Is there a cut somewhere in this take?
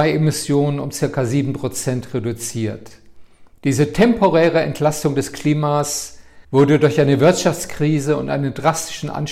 yes; 2 cuts; at 3.5 s, 6.4 s

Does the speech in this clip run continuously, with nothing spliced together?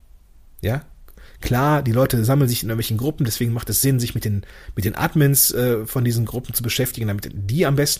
yes; 0 cuts

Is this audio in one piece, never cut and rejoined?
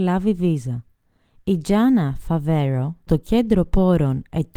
no; 1 cut; at 3.1 s

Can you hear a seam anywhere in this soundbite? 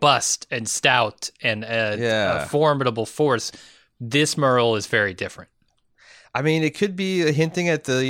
no; 0 cuts

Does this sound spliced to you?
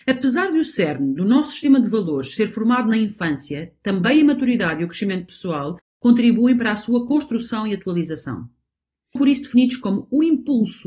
yes; 1 cut; at 9.2 s

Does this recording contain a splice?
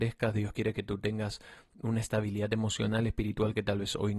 no; 0 cuts

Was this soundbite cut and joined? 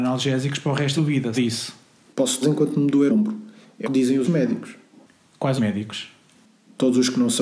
yes; 7 cuts; at 1.0 s, 1.3 s, 2.4 s, 3.1 s, 3.8 s, 4.2 s, 5.6 s

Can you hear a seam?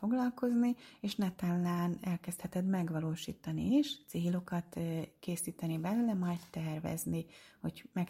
no; 0 cuts

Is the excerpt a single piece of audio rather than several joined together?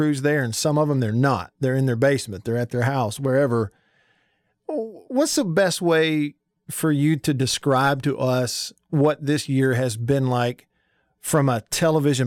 yes; 0 cuts

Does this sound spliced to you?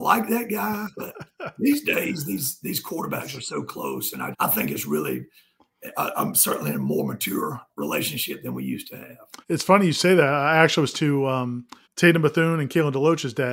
yes; 6 cuts; at 0.9 s, 4.3 s, 7.7 s, 9.4 s, 10.9 s, 11.8 s

